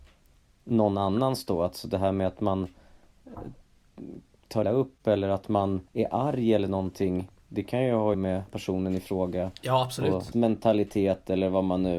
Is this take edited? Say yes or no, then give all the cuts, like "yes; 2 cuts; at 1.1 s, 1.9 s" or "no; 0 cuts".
yes; 5 cuts; at 4.6 s, 5.9 s, 8.1 s, 8.5 s, 10.3 s